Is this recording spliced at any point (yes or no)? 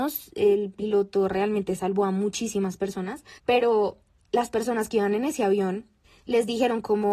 yes